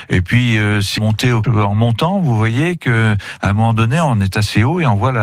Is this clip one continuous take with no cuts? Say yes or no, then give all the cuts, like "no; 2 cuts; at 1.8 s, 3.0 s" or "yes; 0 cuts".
no; 2 cuts; at 1.0 s, 1.4 s